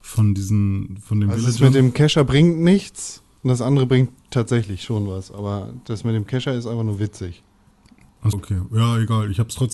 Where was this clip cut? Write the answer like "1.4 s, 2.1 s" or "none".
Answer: 8.3 s